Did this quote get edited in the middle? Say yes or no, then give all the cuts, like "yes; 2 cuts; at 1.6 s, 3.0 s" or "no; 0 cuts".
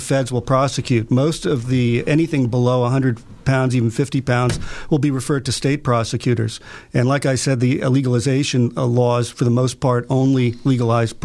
no; 0 cuts